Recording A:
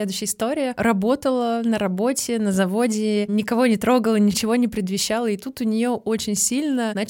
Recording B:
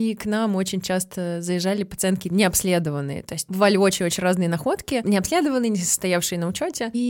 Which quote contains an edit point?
B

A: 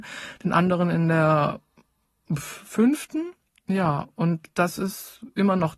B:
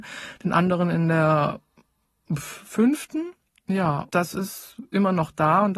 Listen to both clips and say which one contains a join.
B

